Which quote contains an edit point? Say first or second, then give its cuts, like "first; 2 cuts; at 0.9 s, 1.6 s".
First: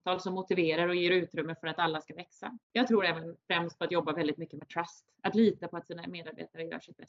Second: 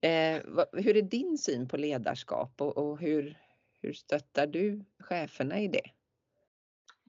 first; 2 cuts; at 2.6 s, 3.4 s